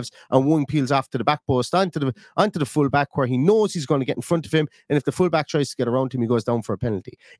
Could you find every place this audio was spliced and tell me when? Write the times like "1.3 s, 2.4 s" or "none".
none